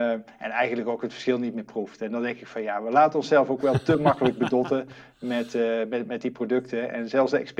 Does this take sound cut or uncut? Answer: uncut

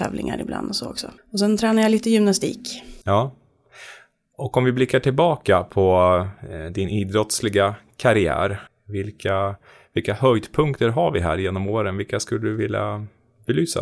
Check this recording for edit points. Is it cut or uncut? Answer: cut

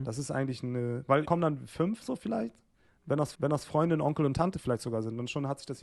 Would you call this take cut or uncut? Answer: cut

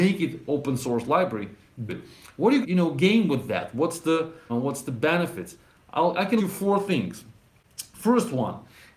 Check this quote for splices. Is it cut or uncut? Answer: cut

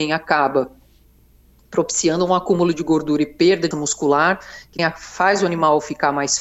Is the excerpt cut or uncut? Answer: cut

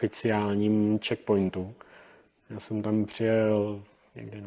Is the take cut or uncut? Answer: uncut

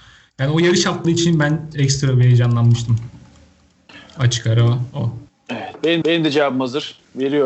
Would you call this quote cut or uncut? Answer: cut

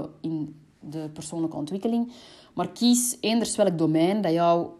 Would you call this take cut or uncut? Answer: uncut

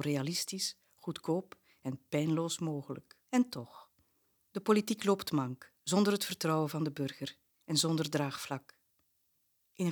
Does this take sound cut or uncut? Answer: cut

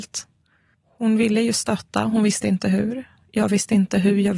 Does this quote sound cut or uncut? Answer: uncut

